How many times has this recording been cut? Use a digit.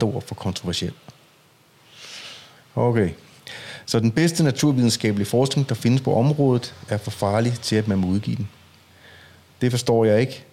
0